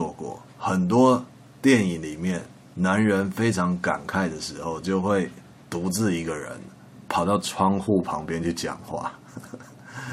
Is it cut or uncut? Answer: uncut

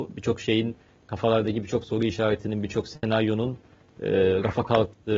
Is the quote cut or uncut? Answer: uncut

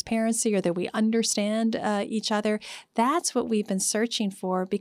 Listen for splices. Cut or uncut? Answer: uncut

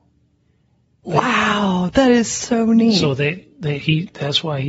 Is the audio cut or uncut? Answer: uncut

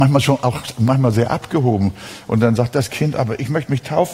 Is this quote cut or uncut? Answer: uncut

